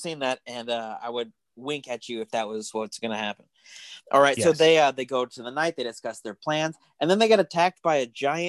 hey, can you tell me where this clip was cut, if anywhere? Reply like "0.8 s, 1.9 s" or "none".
4.0 s